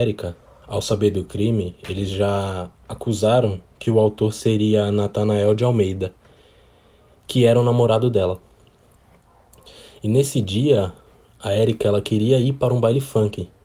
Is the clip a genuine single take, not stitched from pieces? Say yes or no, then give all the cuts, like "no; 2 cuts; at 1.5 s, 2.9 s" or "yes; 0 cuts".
yes; 0 cuts